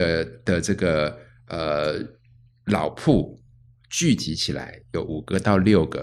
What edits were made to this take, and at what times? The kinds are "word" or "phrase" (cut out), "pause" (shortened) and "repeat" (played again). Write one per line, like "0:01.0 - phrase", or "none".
none